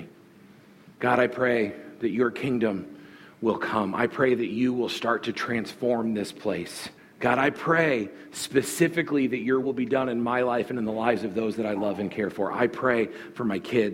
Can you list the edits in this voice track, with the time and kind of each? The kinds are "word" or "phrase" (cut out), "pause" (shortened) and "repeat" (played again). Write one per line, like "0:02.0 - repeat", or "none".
0:00.9 - pause
0:07.0 - pause
0:09.6 - word